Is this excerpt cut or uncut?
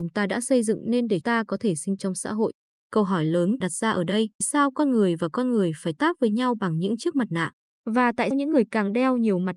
cut